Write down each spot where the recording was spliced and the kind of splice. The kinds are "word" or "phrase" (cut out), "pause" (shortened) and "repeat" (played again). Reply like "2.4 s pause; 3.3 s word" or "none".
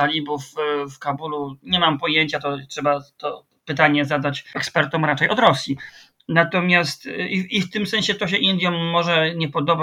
none